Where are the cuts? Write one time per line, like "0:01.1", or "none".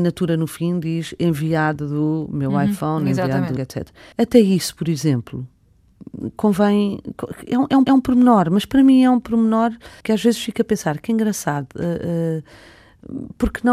0:03.6
0:04.1
0:07.9
0:10.0